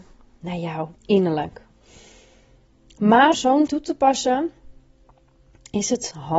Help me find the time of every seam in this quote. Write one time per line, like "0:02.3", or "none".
0:01.0
0:03.3
0:03.7